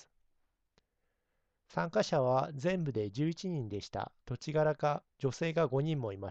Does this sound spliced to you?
yes; 2 cuts; at 4.2 s, 5.1 s

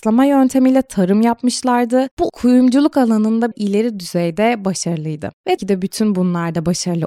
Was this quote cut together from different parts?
yes; 3 cuts; at 2.3 s, 3.5 s, 5.6 s

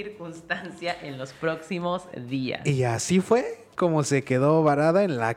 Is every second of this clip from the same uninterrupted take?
yes; 0 cuts

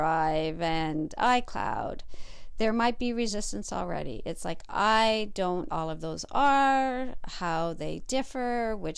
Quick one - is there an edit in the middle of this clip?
yes; 1 cut; at 5.7 s

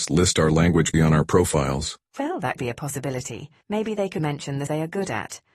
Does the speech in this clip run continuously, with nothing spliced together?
no; 6 cuts; at 0.9 s, 2.1 s, 2.6 s, 3.6 s, 4.2 s, 4.7 s

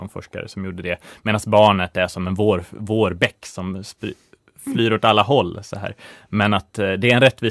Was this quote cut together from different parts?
no; 0 cuts

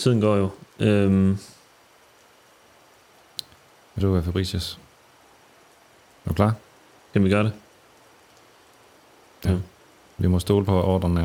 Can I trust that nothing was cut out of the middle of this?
no; 2 cuts; at 4.0 s, 9.4 s

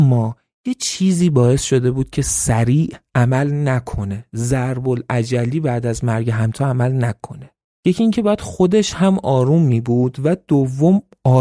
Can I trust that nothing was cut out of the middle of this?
no; 1 cut; at 7.6 s

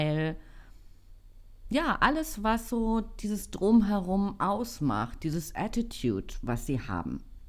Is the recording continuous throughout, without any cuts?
yes; 0 cuts

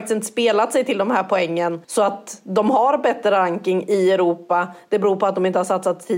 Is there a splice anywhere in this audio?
yes; 1 cut; at 1.8 s

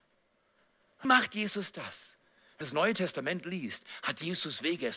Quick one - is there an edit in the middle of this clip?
yes; 2 cuts; at 1.0 s, 2.6 s

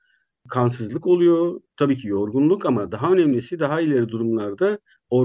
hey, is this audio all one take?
no; 1 cut; at 1.7 s

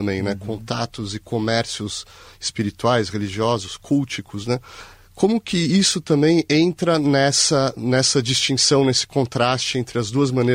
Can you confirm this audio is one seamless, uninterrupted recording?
yes; 0 cuts

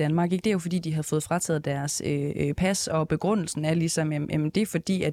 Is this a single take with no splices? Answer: yes; 0 cuts

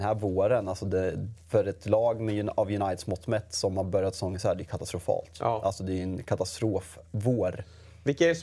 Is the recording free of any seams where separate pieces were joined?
no; 1 cut; at 1.4 s

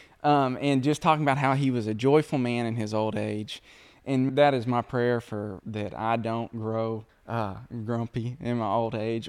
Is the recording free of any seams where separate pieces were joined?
no; 3 cuts; at 4.3 s, 5.6 s, 7.1 s

